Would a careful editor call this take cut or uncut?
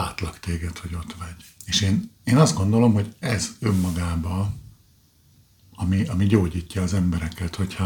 cut